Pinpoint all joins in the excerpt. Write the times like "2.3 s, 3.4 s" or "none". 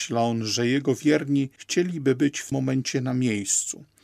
2.5 s